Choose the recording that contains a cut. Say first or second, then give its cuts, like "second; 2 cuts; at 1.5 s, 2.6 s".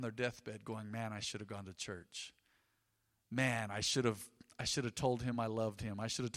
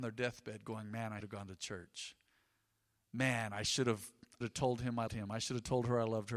second; 3 cuts; at 1.2 s, 4.4 s, 5.1 s